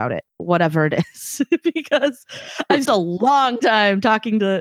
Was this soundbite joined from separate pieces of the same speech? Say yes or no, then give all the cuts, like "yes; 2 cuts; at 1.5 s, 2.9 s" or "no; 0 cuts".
yes; 1 cut; at 2.9 s